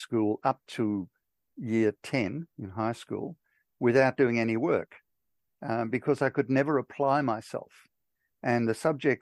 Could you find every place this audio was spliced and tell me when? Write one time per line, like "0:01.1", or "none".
none